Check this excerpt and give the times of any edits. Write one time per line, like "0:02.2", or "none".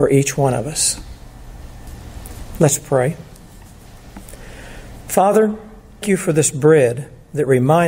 0:06.0

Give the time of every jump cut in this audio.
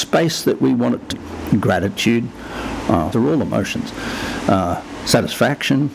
0:01.1
0:03.1

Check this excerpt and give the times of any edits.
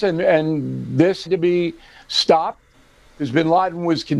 0:01.3

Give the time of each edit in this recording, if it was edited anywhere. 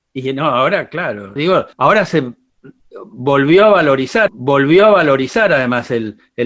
0:01.4
0:01.7
0:04.3

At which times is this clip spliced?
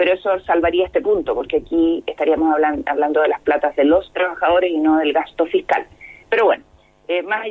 none

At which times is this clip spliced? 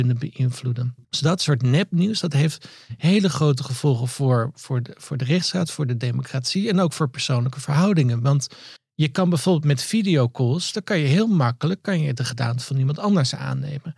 0:01.0
0:08.8

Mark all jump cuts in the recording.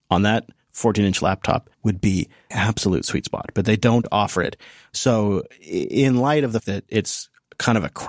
0:01.7
0:02.5
0:06.6

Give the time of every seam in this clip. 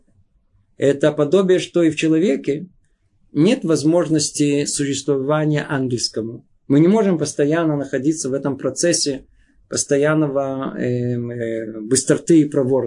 none

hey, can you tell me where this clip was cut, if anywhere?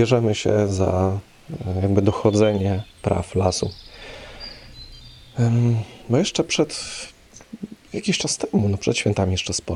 0:02.9
0:06.0

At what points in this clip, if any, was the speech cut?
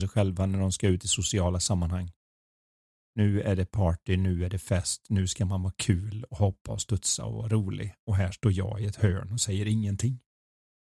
none

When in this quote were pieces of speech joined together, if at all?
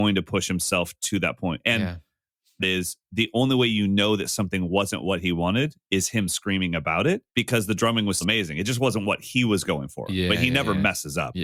0:02.6
0:07.3
0:08.2

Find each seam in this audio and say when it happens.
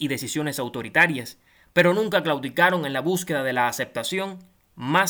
none

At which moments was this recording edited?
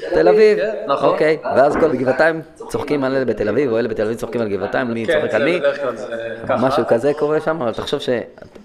0:01.9
0:04.9

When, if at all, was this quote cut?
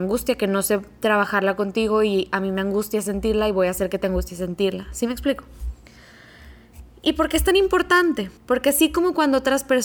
0:08.4

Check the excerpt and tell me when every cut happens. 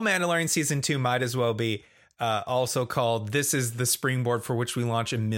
none

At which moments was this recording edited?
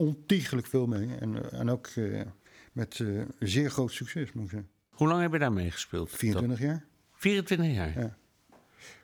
none

